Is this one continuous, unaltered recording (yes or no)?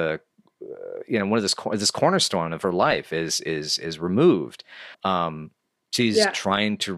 no